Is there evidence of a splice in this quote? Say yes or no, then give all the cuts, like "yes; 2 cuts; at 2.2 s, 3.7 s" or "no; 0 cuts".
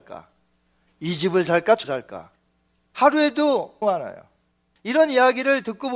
yes; 2 cuts; at 1.8 s, 3.8 s